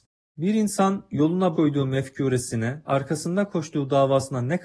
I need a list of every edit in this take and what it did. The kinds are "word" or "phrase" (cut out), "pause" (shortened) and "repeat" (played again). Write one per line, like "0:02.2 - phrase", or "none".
0:01.5 - word
0:02.9 - word